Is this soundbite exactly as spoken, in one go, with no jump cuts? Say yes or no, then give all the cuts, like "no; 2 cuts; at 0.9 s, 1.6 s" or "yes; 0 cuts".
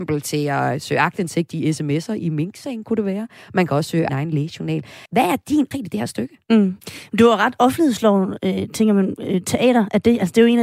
no; 3 cuts; at 4.1 s, 5.1 s, 5.7 s